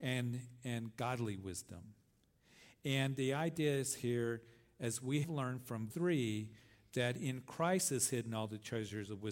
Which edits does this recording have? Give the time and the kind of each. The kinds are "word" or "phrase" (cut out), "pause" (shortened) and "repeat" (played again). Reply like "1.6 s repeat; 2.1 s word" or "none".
5.2 s word; 5.9 s word